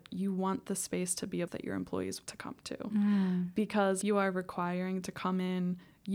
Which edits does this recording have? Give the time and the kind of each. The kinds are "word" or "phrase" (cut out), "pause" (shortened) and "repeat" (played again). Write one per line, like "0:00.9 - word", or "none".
0:01.5 - word
0:02.3 - word
0:04.0 - word
0:05.0 - word